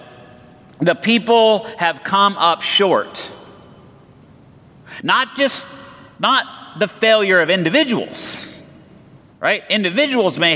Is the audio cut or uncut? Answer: uncut